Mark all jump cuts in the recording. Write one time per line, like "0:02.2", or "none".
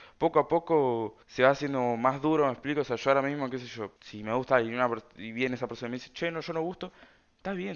0:01.2
0:04.0